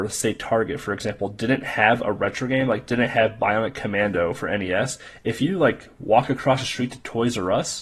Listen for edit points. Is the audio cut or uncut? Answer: uncut